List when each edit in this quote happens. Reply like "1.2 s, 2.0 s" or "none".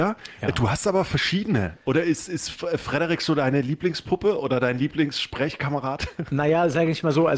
none